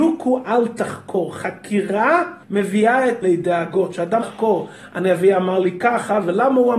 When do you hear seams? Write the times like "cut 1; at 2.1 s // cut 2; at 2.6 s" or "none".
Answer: cut 1; at 2.4 s // cut 2; at 3.2 s // cut 3; at 4.2 s